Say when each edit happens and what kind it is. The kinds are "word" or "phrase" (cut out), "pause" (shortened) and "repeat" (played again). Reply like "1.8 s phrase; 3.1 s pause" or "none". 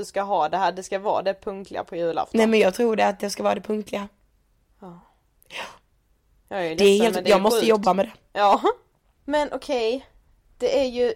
none